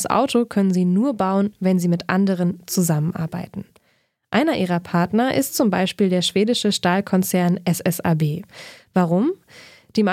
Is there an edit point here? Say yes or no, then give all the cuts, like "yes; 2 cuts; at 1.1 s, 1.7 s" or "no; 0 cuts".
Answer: no; 0 cuts